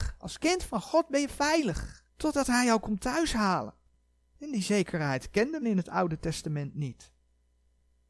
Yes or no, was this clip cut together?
yes